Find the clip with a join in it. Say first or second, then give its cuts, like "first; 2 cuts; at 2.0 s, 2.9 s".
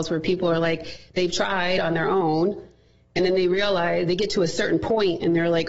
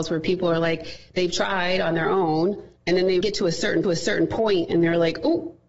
second; 3 cuts; at 2.8 s, 3.2 s, 3.8 s